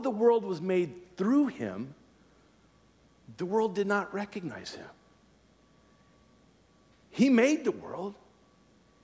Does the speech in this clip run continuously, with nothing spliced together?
yes; 0 cuts

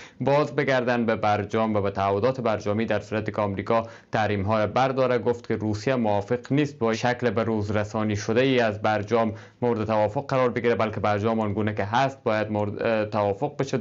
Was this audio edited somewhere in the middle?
yes; 1 cut; at 6.9 s

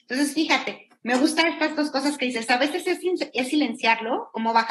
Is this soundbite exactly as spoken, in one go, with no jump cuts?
yes; 0 cuts

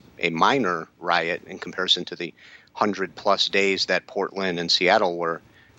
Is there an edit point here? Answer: no; 0 cuts

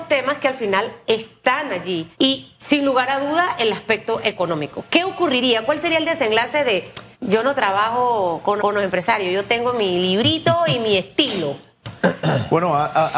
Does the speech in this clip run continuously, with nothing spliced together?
no; 3 cuts; at 2.1 s, 7.1 s, 8.6 s

